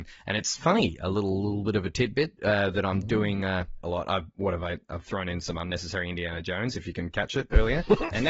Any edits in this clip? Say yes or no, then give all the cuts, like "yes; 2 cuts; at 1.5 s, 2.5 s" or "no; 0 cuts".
no; 0 cuts